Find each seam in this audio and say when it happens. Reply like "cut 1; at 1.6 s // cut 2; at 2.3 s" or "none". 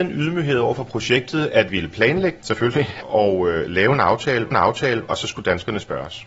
cut 1; at 1.7 s // cut 2; at 2.4 s // cut 3; at 3.0 s // cut 4; at 4.5 s